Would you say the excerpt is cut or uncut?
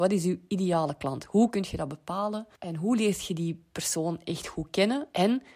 cut